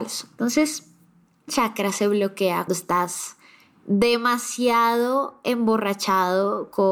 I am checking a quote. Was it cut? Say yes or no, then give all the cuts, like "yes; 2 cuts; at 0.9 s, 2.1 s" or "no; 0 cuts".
yes; 2 cuts; at 1.5 s, 2.7 s